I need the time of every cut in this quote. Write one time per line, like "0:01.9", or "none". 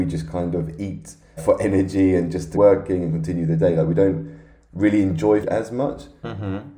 0:01.4
0:02.5
0:05.4